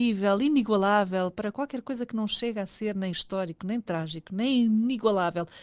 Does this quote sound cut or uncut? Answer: uncut